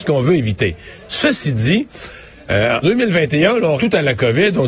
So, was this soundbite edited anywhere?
yes; 2 cuts; at 2.8 s, 3.8 s

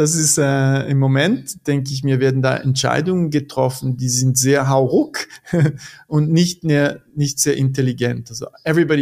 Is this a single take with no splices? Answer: yes; 0 cuts

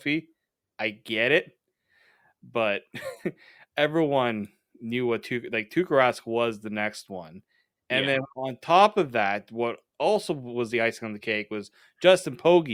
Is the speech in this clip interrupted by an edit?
no; 0 cuts

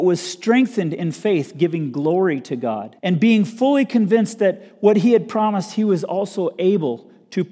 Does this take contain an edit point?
yes; 1 cut; at 3.0 s

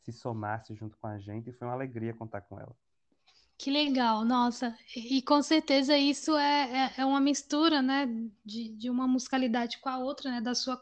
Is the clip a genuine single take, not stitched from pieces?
yes; 0 cuts

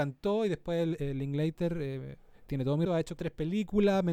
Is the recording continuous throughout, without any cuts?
no; 3 cuts; at 2.5 s, 2.9 s, 3.2 s

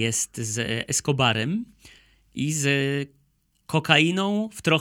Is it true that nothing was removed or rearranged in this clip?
yes; 0 cuts

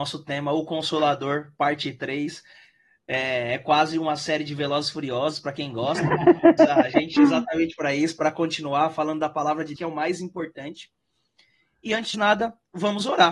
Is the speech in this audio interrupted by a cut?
yes; 4 cuts; at 6.6 s, 7.2 s, 9.8 s, 12.1 s

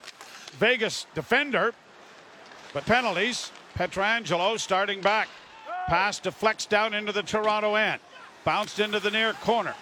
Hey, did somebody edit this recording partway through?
yes; 2 cuts; at 2.8 s, 3.7 s

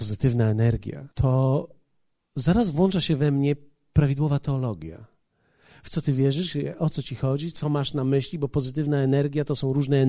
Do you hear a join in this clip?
yes; 2 cuts; at 1.1 s, 7.5 s

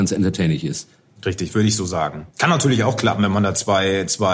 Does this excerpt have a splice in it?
yes; 1 cut; at 2.3 s

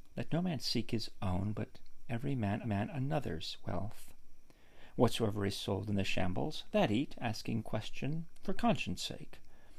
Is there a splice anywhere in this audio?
yes; 2 cuts; at 2.6 s, 7.6 s

